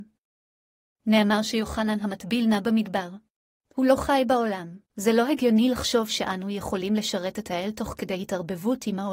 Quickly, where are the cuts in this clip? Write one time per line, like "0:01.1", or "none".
0:03.4
0:04.8

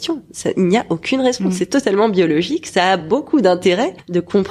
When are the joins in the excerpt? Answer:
none

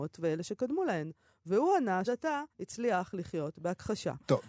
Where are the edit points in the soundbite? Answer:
0:02.1
0:02.5

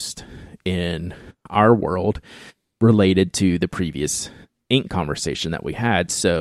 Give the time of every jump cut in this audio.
none

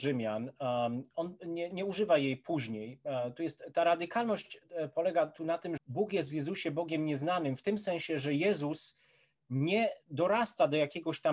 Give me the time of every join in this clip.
0:01.7
0:05.8

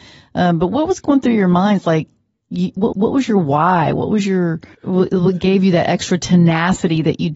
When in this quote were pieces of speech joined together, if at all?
0:02.9
0:04.7

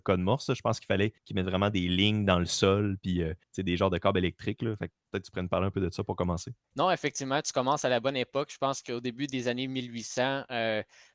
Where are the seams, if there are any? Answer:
0:01.2
0:03.4
0:06.6

